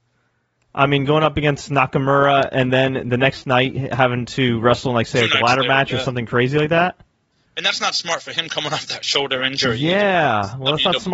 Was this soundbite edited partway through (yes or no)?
no